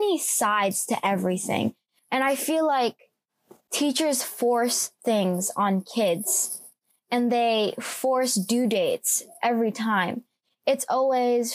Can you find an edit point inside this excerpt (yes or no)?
no